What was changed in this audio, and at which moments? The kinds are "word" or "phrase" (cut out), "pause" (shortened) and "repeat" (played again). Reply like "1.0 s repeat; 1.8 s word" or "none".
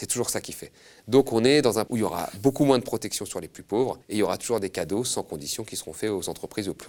1.9 s word; 4.0 s pause